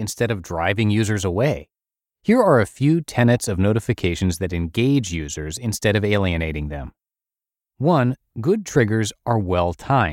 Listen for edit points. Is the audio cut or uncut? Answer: uncut